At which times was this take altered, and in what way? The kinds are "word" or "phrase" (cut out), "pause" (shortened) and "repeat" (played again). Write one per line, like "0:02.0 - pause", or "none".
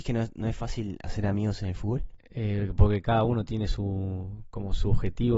none